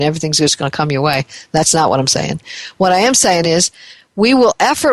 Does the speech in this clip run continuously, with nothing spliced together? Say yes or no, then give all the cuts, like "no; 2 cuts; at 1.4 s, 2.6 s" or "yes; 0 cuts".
yes; 0 cuts